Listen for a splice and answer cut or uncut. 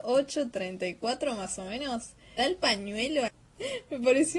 cut